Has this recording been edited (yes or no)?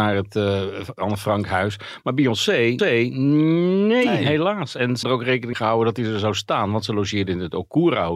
yes